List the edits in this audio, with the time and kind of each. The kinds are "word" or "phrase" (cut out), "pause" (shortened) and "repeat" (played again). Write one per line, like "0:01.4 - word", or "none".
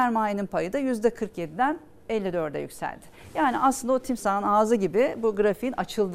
none